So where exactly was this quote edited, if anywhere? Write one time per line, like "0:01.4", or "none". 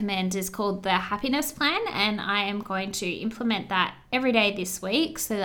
0:04.0